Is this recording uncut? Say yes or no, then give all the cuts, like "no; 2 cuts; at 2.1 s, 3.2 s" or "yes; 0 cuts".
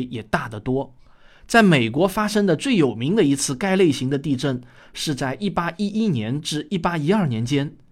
yes; 0 cuts